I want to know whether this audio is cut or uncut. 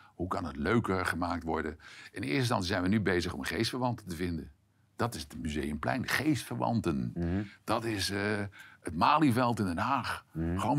uncut